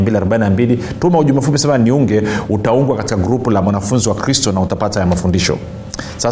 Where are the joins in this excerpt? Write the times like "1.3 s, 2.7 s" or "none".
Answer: none